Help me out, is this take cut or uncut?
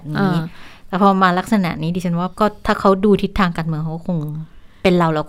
cut